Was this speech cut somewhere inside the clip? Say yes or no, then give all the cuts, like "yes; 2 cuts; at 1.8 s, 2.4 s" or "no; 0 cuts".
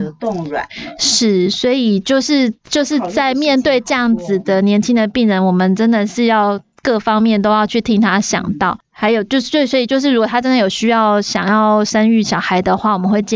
yes; 1 cut; at 2.6 s